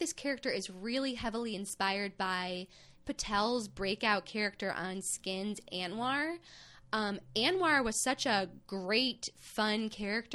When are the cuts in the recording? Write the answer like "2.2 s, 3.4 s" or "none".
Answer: 3.0 s